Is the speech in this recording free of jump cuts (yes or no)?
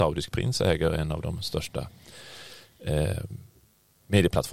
yes